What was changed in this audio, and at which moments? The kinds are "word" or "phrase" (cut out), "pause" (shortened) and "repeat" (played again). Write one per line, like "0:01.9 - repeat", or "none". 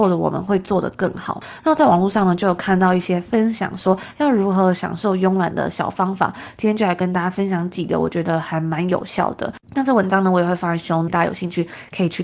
0:09.6 - pause
0:11.1 - phrase